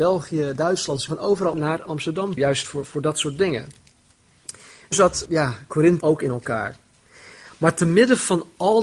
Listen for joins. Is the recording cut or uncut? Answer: cut